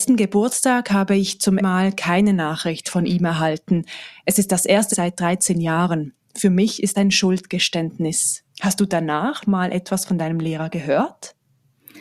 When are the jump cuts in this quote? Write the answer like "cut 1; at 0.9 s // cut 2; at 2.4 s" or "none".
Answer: cut 1; at 1.6 s // cut 2; at 4.9 s // cut 3; at 6.9 s // cut 4; at 8.5 s // cut 5; at 9.4 s